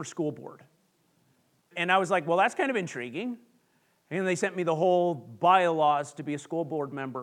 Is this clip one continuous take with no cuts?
no; 1 cut; at 1.7 s

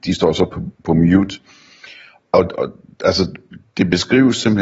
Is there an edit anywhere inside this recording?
no; 0 cuts

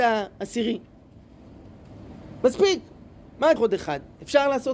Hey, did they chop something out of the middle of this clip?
yes; 1 cut; at 3.6 s

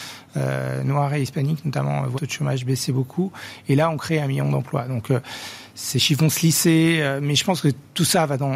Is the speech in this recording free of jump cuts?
no; 1 cut; at 2.1 s

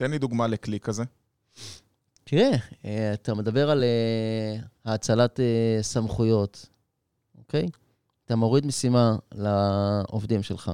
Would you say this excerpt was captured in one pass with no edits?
yes; 0 cuts

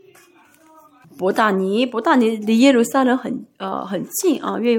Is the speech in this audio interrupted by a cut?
yes; 1 cut; at 1.0 s

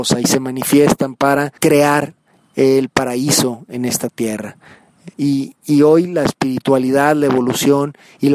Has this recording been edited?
yes; 2 cuts; at 1.6 s, 5.1 s

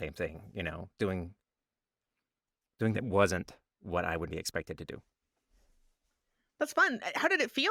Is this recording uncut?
no; 2 cuts; at 2.9 s, 4.3 s

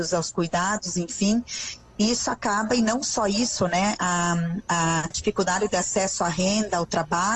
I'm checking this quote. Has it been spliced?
yes; 1 cut; at 5.1 s

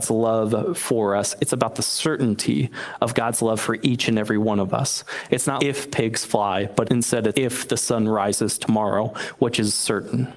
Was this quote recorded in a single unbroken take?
no; 3 cuts; at 5.6 s, 6.8 s, 7.3 s

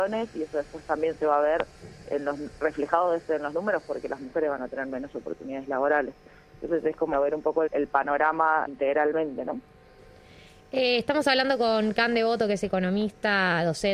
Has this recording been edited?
yes; 4 cuts; at 2.0 s, 7.1 s, 7.7 s, 8.7 s

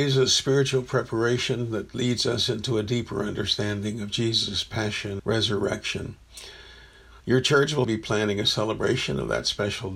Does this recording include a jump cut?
yes; 3 cuts; at 5.2 s, 7.2 s, 7.8 s

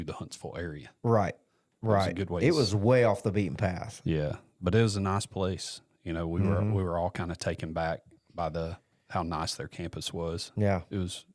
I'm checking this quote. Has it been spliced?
no; 0 cuts

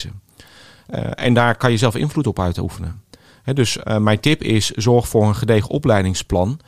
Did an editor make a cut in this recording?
no; 0 cuts

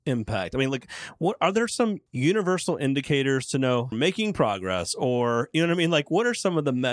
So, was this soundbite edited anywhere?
yes; 2 cuts; at 2.1 s, 3.9 s

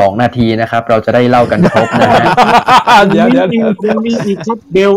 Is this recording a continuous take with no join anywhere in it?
yes; 0 cuts

